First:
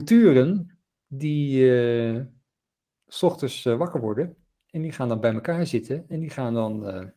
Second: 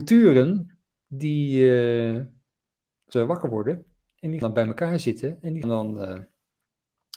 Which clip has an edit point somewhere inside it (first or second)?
second